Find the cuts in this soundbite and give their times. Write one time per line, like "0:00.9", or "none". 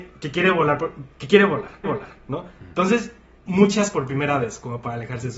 0:01.8
0:03.4
0:03.9